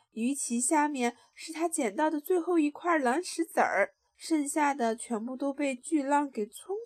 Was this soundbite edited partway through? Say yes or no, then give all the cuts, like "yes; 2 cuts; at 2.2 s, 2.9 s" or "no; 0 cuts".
yes; 1 cut; at 4.1 s